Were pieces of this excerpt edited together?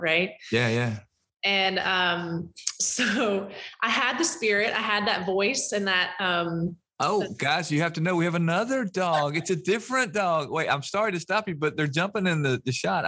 no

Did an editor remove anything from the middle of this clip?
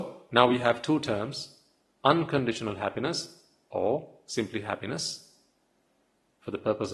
no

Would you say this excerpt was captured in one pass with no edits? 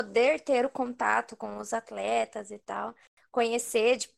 yes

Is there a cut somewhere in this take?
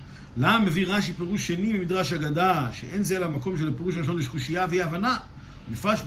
no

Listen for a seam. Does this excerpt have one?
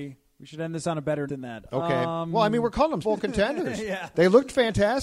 yes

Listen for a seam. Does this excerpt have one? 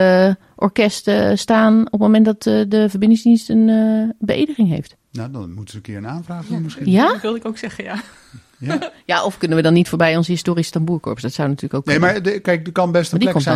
yes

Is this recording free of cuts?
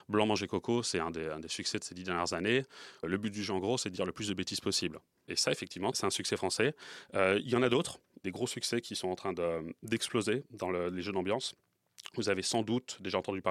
yes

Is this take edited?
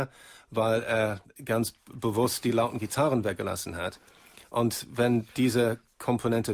yes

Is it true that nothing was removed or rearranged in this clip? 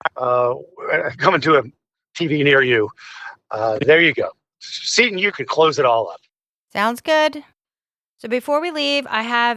yes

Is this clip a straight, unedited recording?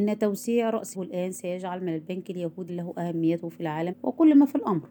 no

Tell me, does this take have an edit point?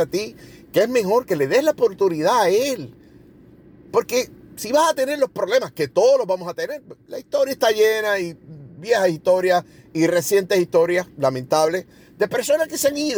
no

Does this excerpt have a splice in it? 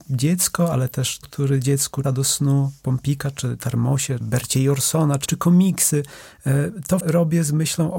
yes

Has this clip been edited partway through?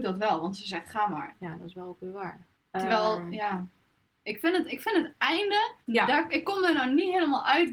yes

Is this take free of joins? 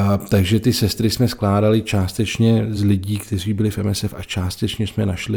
yes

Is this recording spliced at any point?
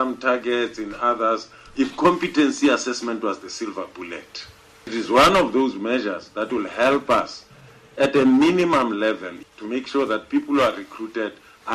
no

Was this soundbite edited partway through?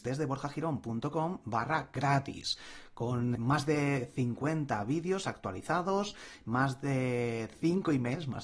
yes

